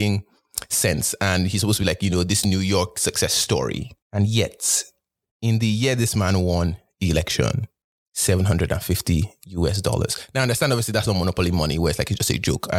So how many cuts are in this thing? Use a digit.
2